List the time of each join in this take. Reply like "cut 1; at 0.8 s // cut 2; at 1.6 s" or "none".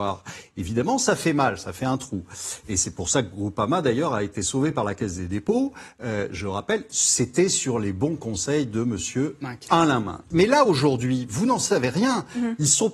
none